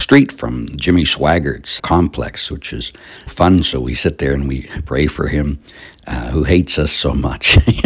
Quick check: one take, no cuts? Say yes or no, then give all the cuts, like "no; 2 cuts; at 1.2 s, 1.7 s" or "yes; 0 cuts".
no; 2 cuts; at 1.8 s, 3.3 s